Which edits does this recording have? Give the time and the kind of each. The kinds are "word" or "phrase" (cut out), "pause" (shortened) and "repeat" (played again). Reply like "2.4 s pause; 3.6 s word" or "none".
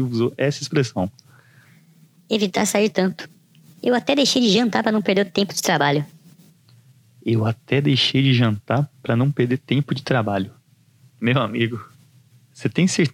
none